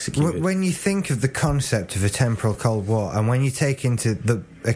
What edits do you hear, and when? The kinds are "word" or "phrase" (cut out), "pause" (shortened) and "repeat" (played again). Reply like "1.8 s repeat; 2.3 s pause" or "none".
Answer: none